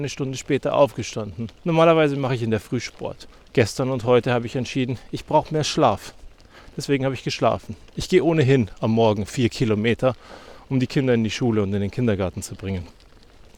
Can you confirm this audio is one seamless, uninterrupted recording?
no; 2 cuts; at 1.6 s, 3.3 s

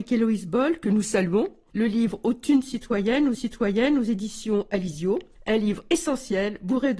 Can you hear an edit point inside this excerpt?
yes; 1 cut; at 3.3 s

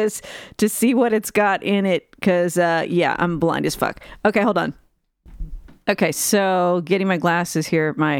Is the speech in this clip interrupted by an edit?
no; 0 cuts

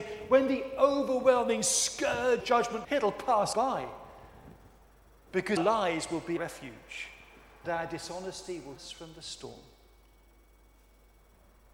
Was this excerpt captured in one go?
no; 7 cuts; at 2.4 s, 2.8 s, 3.5 s, 5.6 s, 6.4 s, 7.6 s, 8.8 s

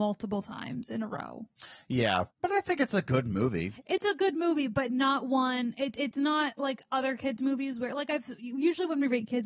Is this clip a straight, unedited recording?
no; 1 cut; at 2.3 s

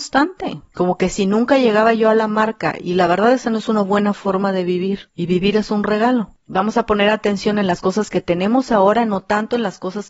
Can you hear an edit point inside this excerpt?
no; 0 cuts

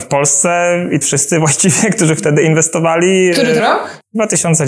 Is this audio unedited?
no; 2 cuts; at 1.0 s, 3.6 s

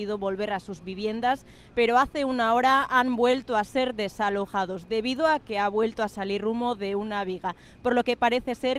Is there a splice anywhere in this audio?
no; 0 cuts

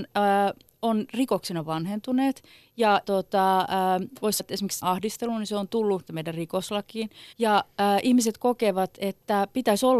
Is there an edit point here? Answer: yes; 5 cuts; at 3.0 s, 4.4 s, 4.8 s, 6.1 s, 7.3 s

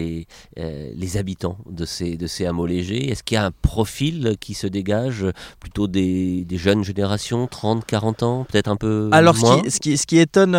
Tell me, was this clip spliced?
no; 0 cuts

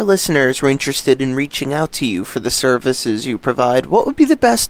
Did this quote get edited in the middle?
no; 0 cuts

